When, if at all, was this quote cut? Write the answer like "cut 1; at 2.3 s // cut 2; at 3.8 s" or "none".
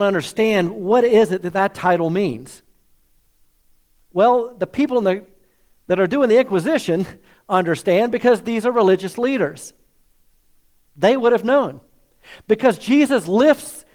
none